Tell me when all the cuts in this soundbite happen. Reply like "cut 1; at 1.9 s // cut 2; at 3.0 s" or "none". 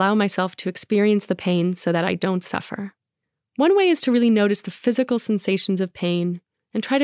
cut 1; at 3.2 s